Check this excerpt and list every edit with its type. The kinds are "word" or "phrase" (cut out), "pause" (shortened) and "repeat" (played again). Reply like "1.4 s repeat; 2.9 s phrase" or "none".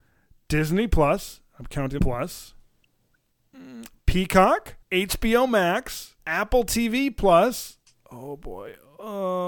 2.0 s phrase; 4.8 s pause; 6.2 s pause